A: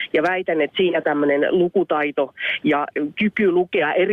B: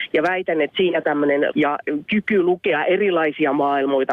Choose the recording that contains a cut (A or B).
B